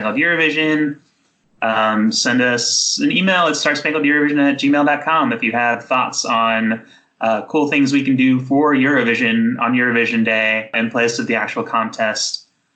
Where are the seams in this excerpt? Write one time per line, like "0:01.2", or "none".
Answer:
none